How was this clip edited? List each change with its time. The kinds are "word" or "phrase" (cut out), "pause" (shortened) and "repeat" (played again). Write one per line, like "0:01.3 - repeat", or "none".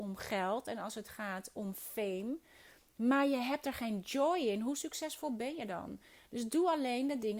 none

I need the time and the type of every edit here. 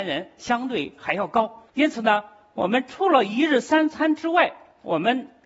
0:01.7 - pause

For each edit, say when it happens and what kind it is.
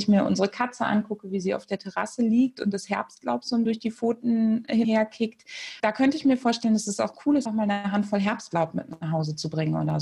0:03.7 - word
0:04.8 - word
0:05.8 - word
0:07.4 - word

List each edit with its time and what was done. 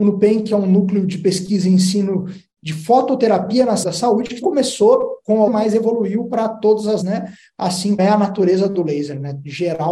0:03.8 - word
0:04.4 - word
0:05.5 - word
0:07.0 - word
0:08.0 - word

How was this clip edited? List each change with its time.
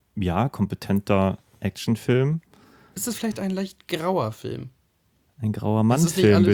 none

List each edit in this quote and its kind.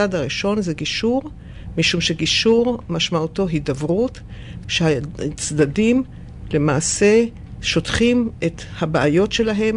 0:04.6 - word

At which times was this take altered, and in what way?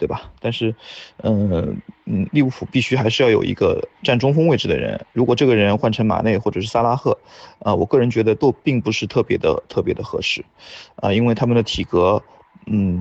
0:02.0 - pause

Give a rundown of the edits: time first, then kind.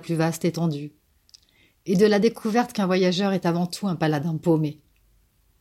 none

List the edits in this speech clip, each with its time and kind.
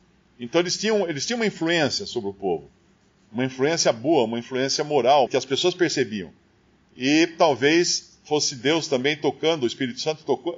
0:05.3 - phrase

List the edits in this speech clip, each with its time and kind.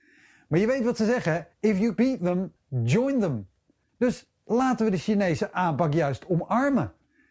0:01.5 - pause
0:02.0 - word
0:04.4 - pause

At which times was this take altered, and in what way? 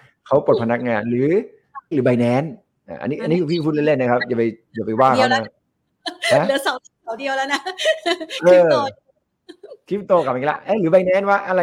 0:01.9 - phrase

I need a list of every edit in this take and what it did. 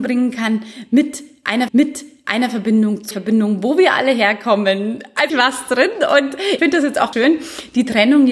0:01.7 - repeat
0:03.1 - phrase
0:05.3 - phrase
0:06.6 - word
0:07.1 - word

